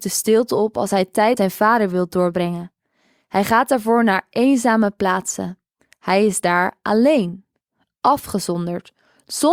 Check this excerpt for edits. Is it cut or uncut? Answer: cut